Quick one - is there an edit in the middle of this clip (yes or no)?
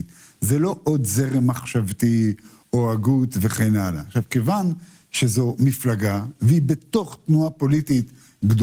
no